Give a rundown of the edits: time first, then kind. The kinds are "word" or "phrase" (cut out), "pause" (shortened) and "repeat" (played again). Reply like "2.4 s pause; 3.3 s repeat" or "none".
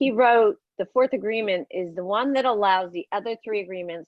none